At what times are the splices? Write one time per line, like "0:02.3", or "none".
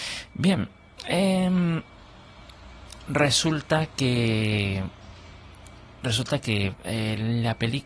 0:06.7